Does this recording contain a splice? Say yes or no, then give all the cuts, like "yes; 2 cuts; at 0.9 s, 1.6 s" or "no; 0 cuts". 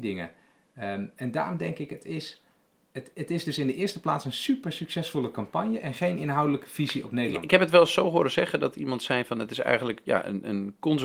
no; 0 cuts